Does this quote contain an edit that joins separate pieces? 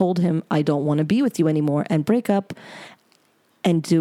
no; 0 cuts

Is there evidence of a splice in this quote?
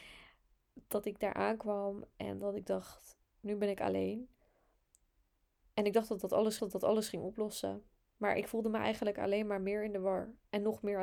yes; 2 cuts; at 3.2 s, 6.6 s

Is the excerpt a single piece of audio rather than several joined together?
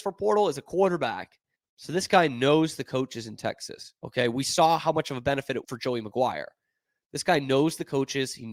no; 3 cuts; at 1.5 s, 4.0 s, 5.6 s

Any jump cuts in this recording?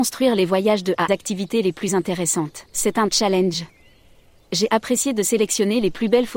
yes; 2 cuts; at 1.1 s, 2.7 s

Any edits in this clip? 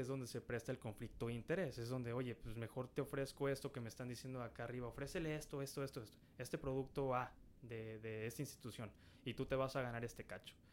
no; 0 cuts

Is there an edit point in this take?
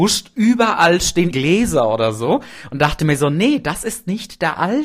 yes; 1 cut; at 1.3 s

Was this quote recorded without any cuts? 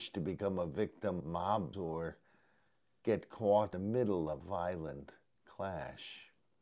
no; 4 cuts; at 1.2 s, 1.7 s, 3.7 s, 4.4 s

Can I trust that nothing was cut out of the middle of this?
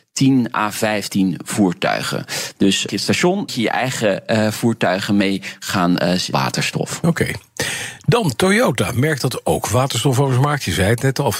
no; 3 cuts; at 2.9 s, 3.5 s, 6.3 s

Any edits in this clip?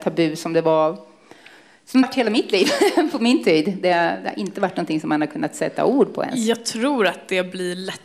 yes; 1 cut; at 2.0 s

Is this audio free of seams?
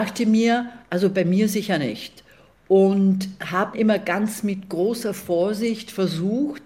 no; 1 cut; at 3.7 s

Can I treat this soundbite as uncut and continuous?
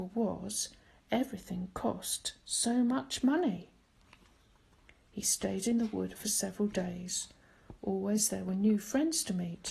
yes; 0 cuts

